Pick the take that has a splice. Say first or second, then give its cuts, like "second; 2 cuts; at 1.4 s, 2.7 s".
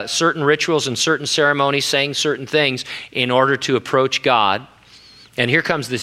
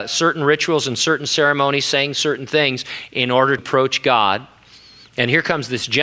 second; 1 cut; at 3.6 s